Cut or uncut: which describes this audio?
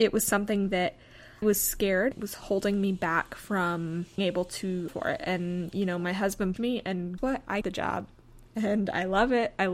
cut